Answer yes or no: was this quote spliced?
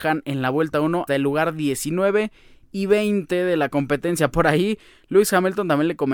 yes